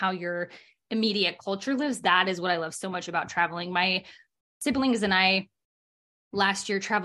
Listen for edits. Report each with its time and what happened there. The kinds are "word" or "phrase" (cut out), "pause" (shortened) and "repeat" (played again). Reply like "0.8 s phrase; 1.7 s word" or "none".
none